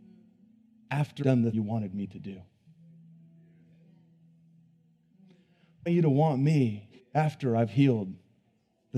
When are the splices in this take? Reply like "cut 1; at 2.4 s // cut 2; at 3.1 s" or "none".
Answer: cut 1; at 1.2 s // cut 2; at 1.5 s // cut 3; at 5.9 s // cut 4; at 7.0 s